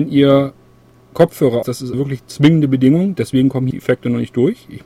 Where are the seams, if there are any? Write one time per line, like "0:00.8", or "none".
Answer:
0:01.6
0:01.9
0:03.7